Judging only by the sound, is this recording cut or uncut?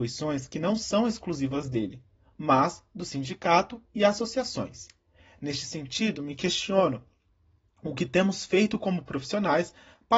uncut